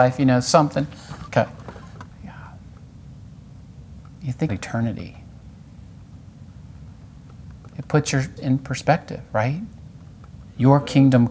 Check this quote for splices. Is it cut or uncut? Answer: cut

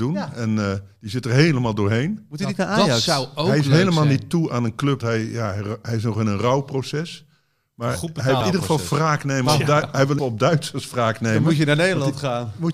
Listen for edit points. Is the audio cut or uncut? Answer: cut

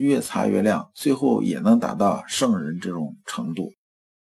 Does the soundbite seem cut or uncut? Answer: uncut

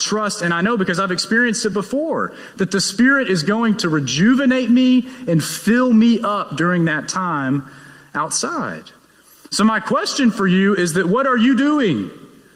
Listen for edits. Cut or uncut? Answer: uncut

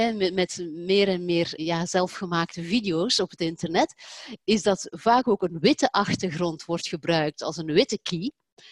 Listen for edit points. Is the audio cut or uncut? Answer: cut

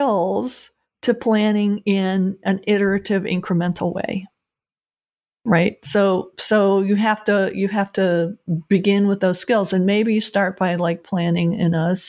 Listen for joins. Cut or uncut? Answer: uncut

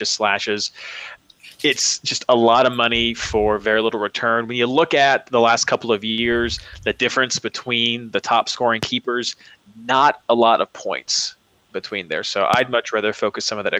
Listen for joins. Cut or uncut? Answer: uncut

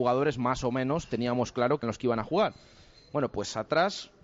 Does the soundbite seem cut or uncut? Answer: cut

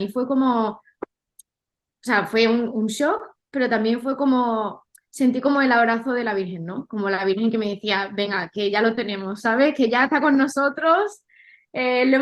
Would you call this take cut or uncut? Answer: uncut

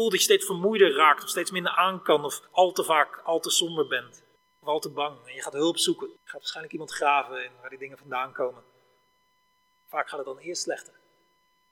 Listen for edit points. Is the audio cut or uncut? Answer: cut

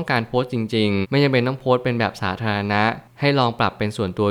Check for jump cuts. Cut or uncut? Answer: cut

